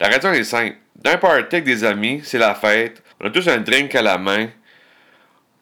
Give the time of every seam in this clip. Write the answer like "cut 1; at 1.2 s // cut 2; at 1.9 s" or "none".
cut 1; at 3.1 s